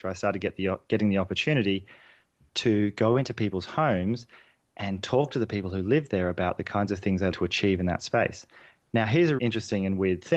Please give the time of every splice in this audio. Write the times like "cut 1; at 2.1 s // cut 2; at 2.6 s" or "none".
cut 1; at 7.3 s // cut 2; at 9.4 s